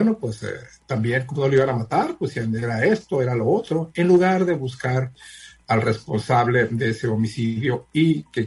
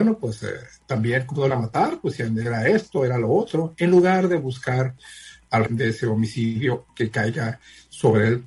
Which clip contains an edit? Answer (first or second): second